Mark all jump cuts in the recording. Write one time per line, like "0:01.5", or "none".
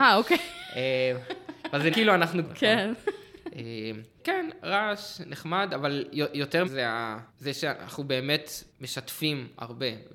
0:01.9
0:02.4
0:06.6
0:07.3
0:08.7